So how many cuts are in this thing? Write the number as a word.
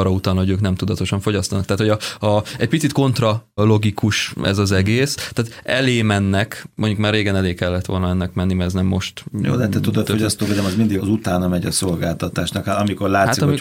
two